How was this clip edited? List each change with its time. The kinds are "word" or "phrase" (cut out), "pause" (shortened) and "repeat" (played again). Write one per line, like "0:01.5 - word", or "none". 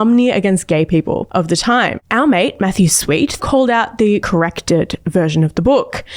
0:03.4 - word
0:04.2 - word